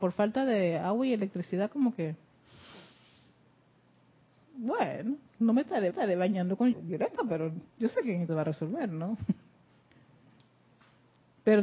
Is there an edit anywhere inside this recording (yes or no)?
yes